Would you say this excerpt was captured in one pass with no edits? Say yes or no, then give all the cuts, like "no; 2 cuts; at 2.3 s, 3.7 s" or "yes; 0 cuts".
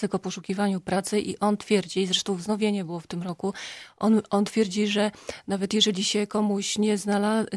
yes; 0 cuts